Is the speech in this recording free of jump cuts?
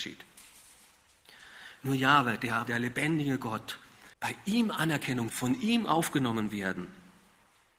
no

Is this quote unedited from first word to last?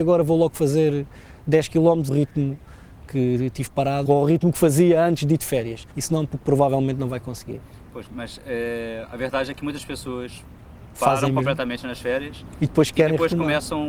no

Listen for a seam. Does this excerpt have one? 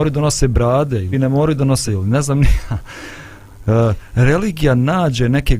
yes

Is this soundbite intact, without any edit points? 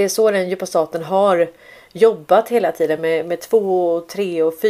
yes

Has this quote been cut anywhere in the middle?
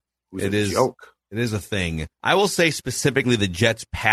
yes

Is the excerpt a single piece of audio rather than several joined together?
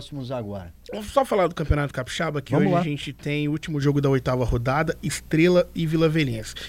yes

